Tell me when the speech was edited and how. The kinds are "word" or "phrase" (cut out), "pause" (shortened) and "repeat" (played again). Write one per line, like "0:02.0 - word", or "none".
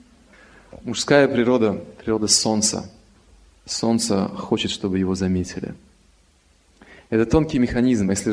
none